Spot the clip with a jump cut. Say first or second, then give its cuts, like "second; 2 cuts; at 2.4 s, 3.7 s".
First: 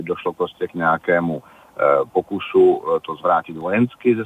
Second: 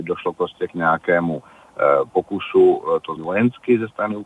second; 1 cut; at 3.2 s